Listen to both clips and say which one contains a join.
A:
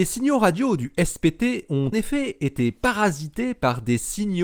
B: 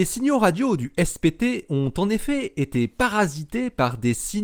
A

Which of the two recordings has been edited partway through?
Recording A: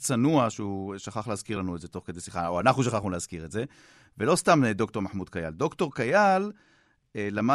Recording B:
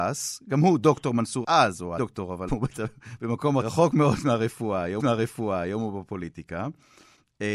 B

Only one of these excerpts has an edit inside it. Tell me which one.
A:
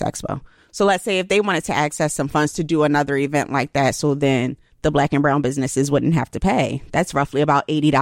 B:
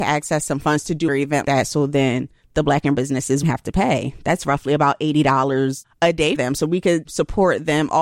B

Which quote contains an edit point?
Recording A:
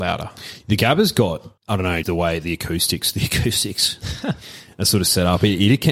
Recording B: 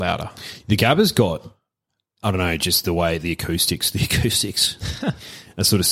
A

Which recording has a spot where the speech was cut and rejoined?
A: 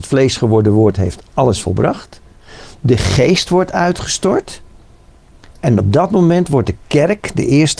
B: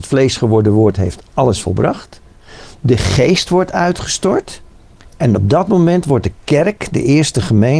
B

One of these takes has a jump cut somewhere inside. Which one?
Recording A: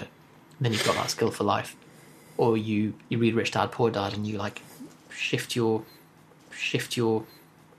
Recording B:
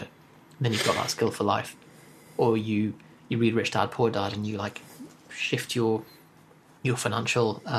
A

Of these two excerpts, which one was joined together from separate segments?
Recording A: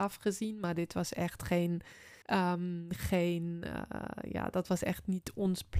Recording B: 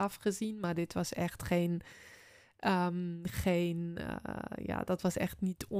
A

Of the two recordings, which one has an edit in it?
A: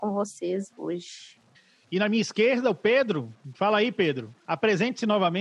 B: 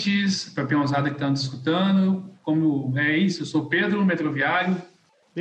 A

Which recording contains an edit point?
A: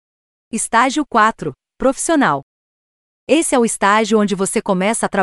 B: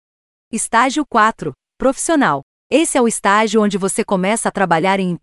B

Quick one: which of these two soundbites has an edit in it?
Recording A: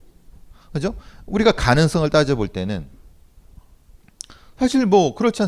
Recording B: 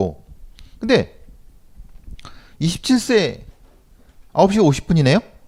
B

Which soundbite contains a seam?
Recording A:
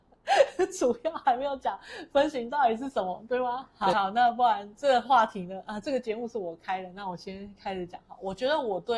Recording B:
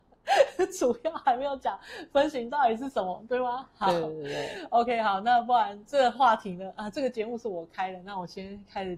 A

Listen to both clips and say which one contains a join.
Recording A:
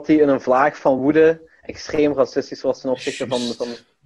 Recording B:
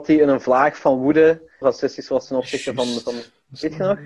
B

